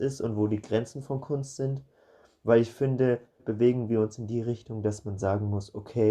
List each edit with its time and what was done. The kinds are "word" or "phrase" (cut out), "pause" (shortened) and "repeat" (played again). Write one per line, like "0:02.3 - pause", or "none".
0:03.4 - word